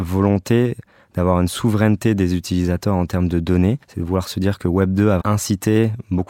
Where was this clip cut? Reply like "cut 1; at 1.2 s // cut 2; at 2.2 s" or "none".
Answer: cut 1; at 3.8 s // cut 2; at 5.2 s